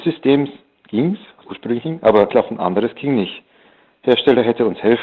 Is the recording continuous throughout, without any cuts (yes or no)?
no